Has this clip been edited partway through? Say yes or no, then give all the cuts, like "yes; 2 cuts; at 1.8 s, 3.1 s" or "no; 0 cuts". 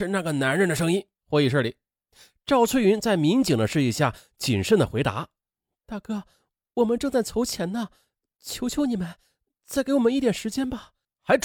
yes; 1 cut; at 1.2 s